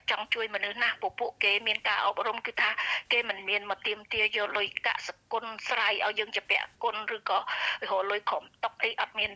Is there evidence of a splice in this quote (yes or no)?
no